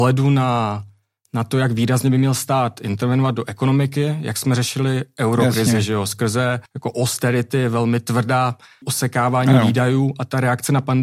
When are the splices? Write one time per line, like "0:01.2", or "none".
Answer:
0:06.7
0:08.8